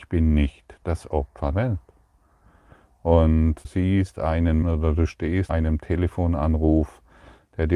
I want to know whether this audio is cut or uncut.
cut